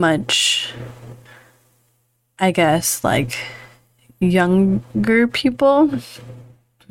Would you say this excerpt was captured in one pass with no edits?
yes; 0 cuts

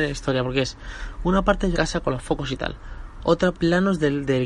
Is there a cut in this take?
yes; 2 cuts; at 1.7 s, 3.5 s

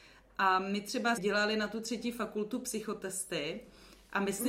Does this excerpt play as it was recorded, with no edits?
no; 1 cut; at 1.2 s

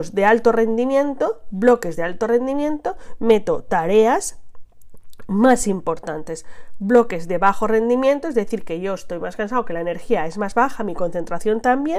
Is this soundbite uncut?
yes; 0 cuts

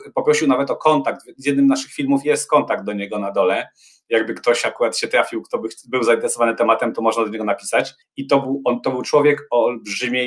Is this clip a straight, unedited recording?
no; 1 cut; at 8.0 s

